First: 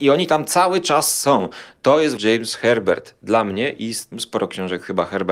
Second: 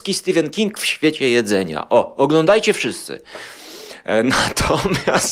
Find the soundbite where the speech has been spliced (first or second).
first